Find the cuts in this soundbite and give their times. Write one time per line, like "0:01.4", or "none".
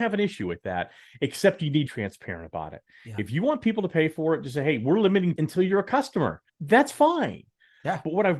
0:01.9
0:05.4
0:06.5